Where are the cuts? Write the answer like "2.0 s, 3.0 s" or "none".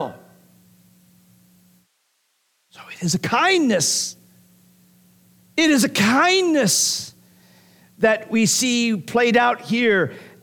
none